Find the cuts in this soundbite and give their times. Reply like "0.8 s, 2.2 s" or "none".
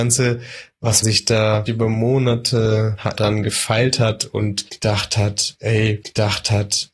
1.0 s, 1.7 s, 3.1 s, 6.0 s